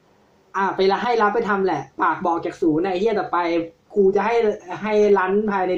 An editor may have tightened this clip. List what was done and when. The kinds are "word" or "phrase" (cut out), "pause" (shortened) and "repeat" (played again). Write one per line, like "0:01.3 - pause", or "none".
0:01.9 - pause